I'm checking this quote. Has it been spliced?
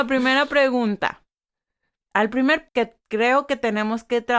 yes; 1 cut; at 2.7 s

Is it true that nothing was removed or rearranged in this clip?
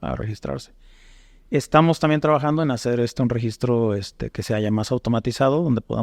yes; 0 cuts

